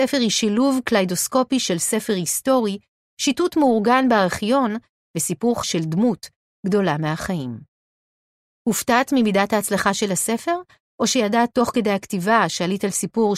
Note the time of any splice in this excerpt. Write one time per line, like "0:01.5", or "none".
0:05.6